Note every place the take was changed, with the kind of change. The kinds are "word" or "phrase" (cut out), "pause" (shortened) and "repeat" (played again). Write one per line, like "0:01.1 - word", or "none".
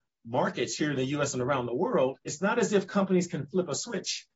0:02.2 - pause

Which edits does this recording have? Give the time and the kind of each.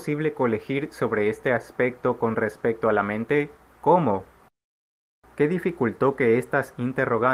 none

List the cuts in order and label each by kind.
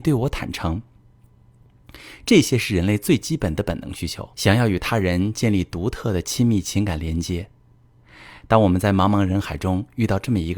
0:04.3 - pause

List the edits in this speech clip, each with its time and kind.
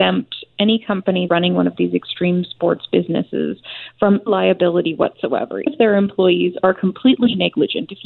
0:01.3 - word
0:04.3 - word
0:05.7 - word

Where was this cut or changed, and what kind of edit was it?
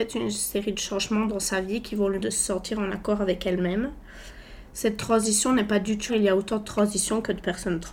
0:02.2 - word
0:06.1 - word

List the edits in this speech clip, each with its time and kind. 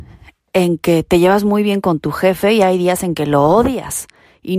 none

